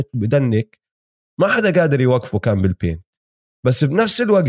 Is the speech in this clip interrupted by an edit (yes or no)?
no